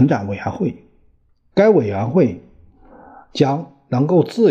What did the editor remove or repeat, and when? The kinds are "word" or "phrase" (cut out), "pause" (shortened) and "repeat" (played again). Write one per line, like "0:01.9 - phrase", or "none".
none